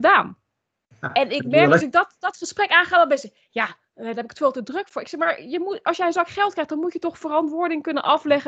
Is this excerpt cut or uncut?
uncut